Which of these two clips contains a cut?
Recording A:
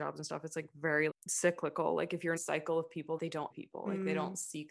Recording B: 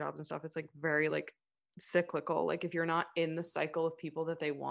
A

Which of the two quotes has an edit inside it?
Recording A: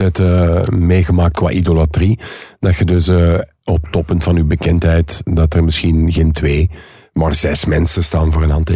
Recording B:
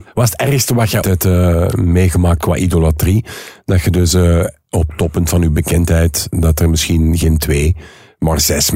B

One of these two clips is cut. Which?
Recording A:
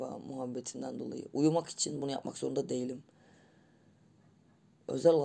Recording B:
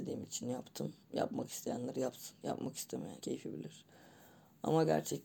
B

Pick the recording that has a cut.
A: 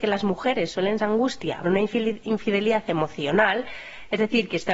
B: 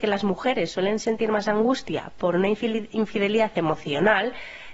A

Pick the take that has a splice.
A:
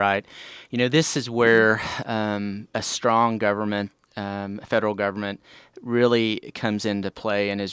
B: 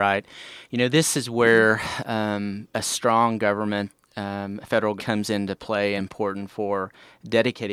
B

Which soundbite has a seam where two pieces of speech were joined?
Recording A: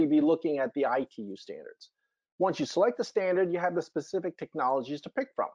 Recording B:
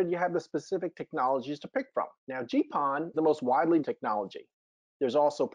B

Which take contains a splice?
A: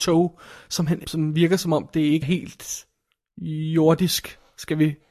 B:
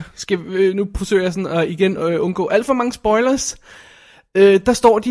A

